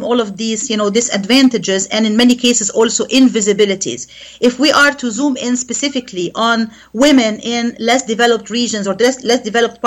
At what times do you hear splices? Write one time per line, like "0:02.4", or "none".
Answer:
none

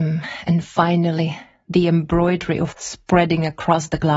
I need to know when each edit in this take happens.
0:02.7

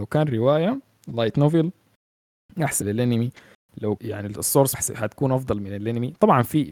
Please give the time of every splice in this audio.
0:02.8
0:04.0
0:04.7

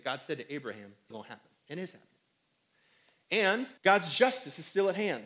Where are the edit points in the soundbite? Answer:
0:01.1
0:01.6
0:03.8

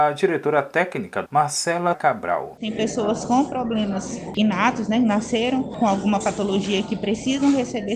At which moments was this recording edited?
0:01.3
0:01.9

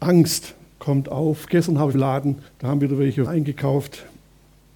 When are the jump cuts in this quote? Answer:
0:01.9
0:02.5
0:03.3

